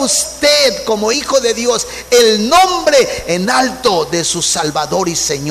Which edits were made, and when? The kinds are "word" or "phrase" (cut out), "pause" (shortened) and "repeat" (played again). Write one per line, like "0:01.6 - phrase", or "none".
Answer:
none